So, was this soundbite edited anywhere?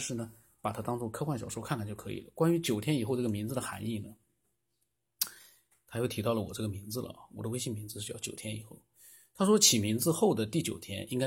no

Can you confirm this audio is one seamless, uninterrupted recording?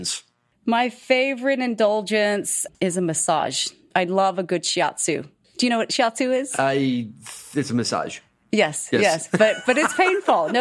yes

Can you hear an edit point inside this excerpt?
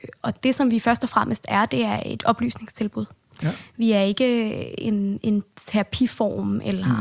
no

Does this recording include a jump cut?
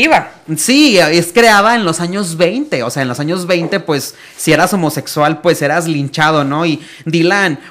no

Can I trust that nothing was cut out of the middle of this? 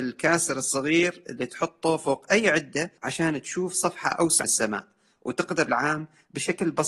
no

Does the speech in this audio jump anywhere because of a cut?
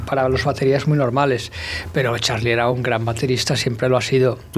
no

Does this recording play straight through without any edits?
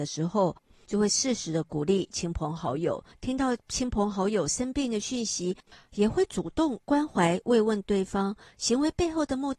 yes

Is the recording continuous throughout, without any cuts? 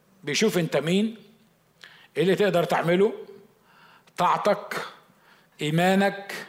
yes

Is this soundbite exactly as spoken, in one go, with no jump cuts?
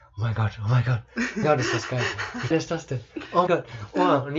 no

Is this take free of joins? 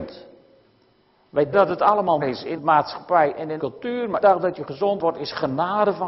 no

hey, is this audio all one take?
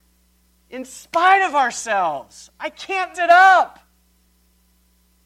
no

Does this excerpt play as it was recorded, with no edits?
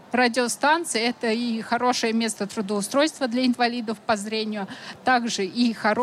yes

